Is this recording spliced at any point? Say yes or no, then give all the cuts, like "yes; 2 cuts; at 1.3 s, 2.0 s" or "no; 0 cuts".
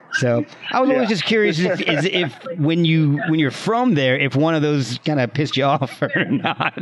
no; 0 cuts